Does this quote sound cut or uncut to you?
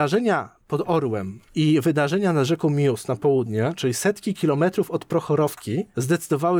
uncut